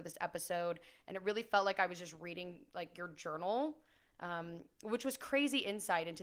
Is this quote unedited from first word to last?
yes; 0 cuts

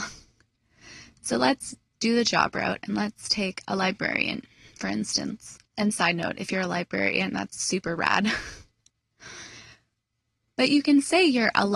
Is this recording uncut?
no; 1 cut; at 5.6 s

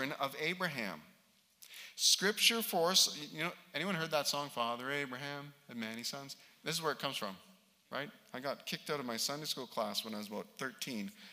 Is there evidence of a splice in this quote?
no; 0 cuts

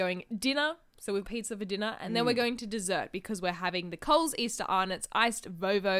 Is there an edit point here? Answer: yes; 1 cut; at 1.2 s

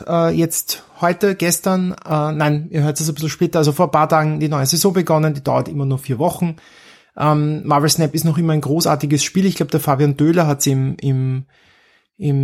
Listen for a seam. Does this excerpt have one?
no; 0 cuts

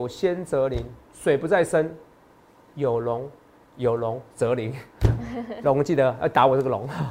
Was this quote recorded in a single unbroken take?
yes; 0 cuts

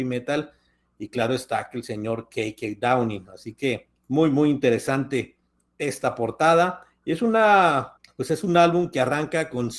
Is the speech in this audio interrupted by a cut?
yes; 2 cuts; at 4.0 s, 8.0 s

